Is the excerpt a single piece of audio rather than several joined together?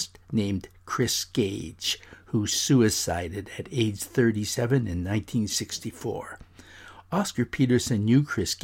yes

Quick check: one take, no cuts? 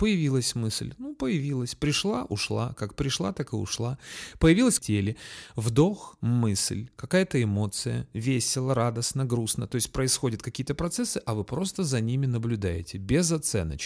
no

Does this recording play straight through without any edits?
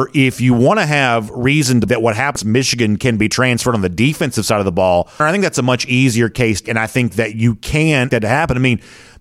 no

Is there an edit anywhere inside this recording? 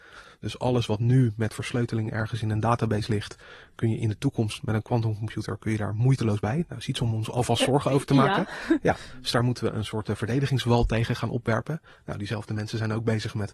no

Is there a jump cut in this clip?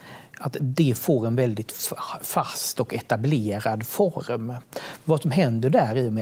no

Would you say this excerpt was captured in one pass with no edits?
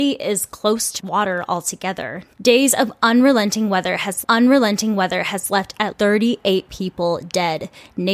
no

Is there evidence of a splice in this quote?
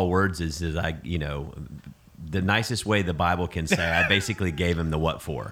no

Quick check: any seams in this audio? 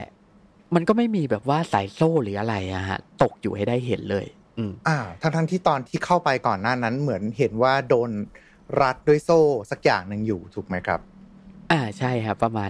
no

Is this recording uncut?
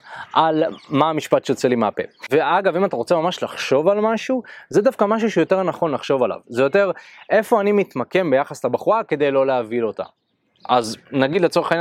yes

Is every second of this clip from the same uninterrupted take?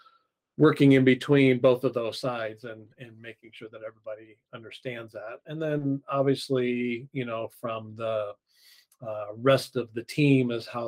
yes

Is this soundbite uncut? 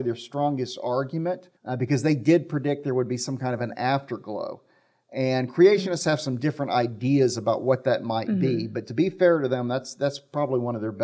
no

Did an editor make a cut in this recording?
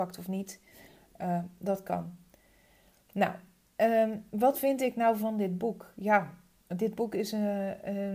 no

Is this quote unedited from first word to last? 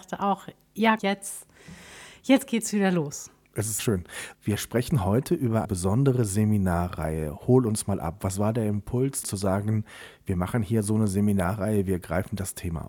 no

